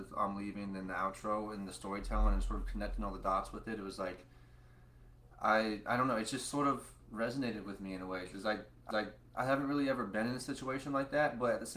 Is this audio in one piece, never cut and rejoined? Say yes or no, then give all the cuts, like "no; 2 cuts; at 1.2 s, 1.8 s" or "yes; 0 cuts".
no; 1 cut; at 8.9 s